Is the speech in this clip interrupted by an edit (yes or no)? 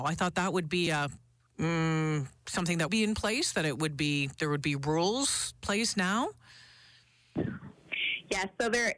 yes